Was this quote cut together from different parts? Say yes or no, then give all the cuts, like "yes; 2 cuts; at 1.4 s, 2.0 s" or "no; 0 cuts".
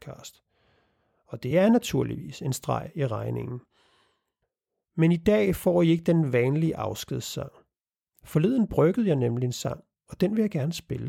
no; 0 cuts